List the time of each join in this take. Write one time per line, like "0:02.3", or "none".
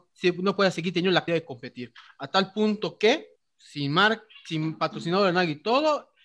0:01.3
0:03.4